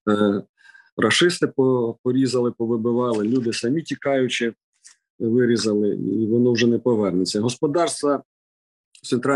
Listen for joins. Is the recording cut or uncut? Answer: uncut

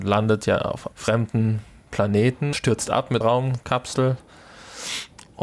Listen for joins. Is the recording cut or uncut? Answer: cut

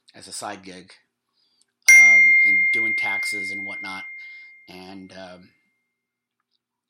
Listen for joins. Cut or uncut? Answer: uncut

